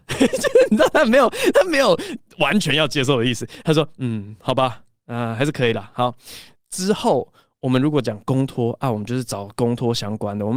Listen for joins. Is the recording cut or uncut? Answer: uncut